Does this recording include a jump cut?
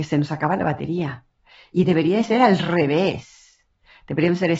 no; 0 cuts

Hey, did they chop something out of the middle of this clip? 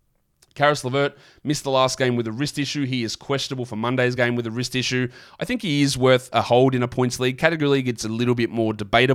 no; 0 cuts

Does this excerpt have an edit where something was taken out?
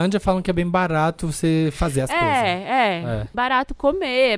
yes; 1 cut; at 3.3 s

